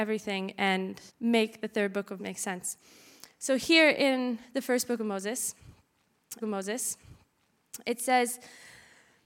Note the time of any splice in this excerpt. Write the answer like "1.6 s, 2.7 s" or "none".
1.1 s, 2.2 s, 6.4 s